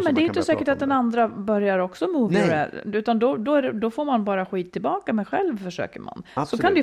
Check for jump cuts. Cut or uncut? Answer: uncut